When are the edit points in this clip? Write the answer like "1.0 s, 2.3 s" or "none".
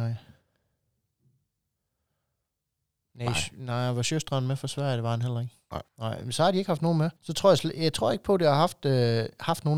5.9 s, 7.2 s